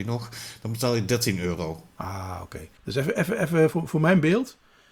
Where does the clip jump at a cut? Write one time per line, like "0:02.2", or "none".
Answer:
0:02.8